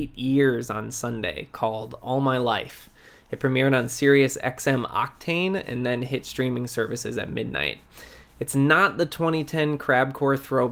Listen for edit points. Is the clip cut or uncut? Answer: uncut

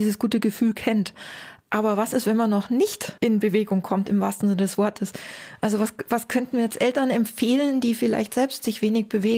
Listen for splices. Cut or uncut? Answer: cut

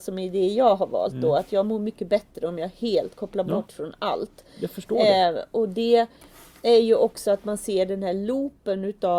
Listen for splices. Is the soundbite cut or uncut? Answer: uncut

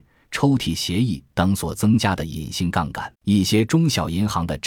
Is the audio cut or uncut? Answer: cut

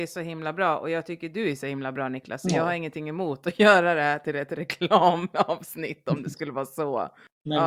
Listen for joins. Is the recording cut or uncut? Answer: uncut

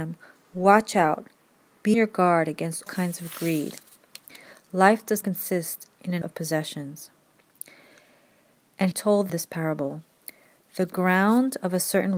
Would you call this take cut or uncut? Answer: cut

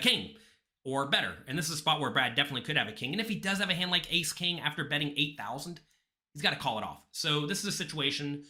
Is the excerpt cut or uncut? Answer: uncut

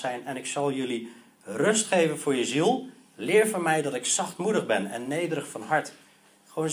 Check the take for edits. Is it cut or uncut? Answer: uncut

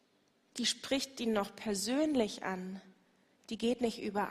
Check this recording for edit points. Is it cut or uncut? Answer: uncut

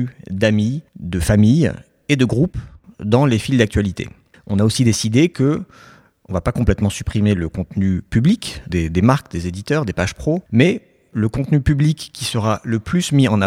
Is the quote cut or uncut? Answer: cut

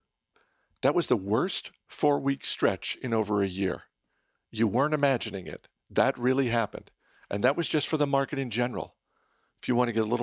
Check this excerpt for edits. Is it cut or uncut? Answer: uncut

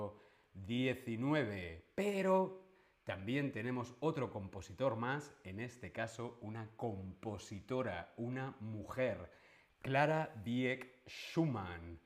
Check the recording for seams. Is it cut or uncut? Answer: uncut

